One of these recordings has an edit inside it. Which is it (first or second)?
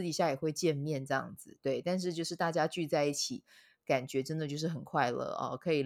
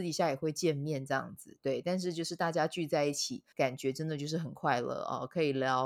second